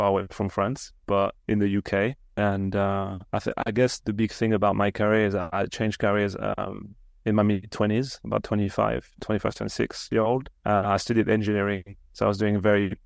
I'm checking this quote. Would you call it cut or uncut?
uncut